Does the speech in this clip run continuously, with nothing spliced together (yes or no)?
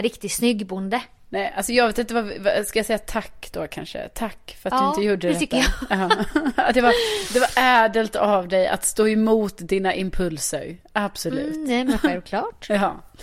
yes